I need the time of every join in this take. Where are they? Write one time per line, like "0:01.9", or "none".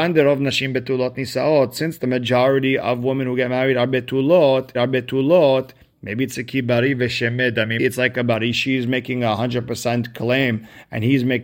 0:04.7
0:07.8